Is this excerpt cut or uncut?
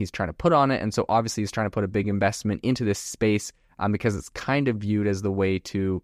uncut